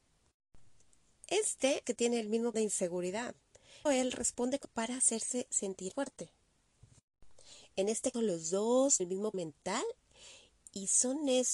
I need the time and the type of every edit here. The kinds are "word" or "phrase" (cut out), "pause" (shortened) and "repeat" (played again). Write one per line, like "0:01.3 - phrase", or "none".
0:01.8 - word
0:02.5 - word
0:03.9 - word
0:04.6 - word
0:05.9 - word
0:08.1 - word
0:09.0 - word
0:09.3 - word